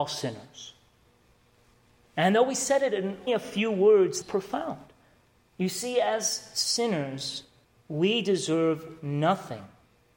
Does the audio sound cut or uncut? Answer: cut